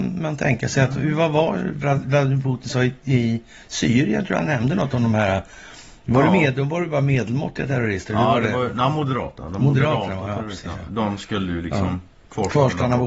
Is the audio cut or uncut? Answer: uncut